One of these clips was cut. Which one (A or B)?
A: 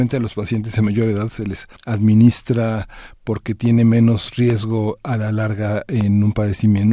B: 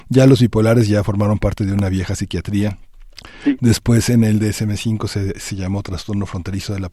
A